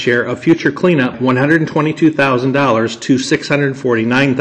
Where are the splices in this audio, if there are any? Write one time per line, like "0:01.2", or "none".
0:01.1